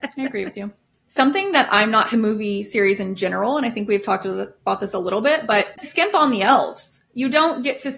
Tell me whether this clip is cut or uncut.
cut